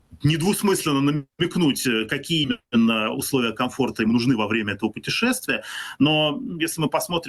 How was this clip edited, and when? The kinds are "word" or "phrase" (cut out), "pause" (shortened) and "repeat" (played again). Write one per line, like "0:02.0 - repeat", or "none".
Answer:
0:01.3 - pause

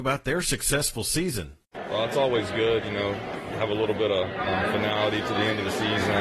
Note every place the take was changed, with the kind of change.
none

